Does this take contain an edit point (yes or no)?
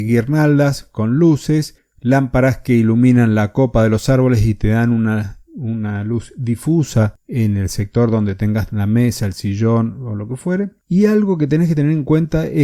yes